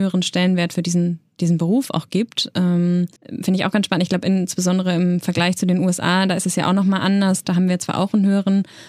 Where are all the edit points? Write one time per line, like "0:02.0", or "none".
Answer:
0:03.2